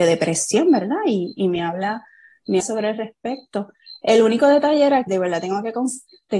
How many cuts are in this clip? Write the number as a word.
two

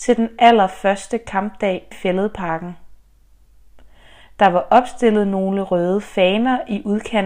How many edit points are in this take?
one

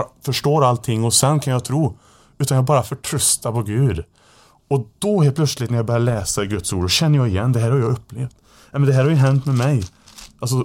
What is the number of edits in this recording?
zero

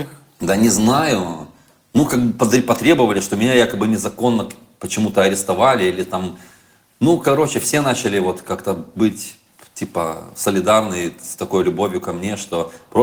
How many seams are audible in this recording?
zero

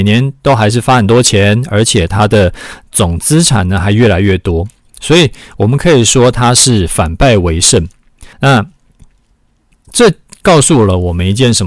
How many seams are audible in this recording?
one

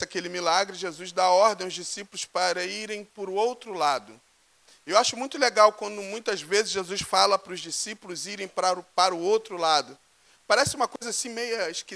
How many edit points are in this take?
zero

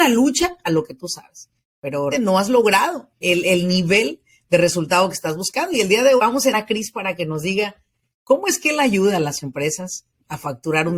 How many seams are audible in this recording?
four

